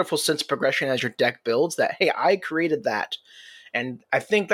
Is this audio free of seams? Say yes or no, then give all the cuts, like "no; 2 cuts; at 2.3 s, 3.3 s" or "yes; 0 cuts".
yes; 0 cuts